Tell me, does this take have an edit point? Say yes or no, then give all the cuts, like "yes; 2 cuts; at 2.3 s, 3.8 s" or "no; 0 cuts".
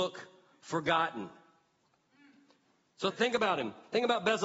yes; 1 cut; at 3.1 s